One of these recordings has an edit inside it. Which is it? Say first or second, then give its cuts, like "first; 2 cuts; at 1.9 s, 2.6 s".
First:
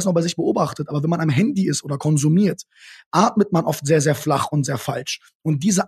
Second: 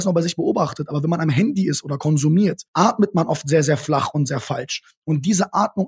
second; 1 cut; at 2.7 s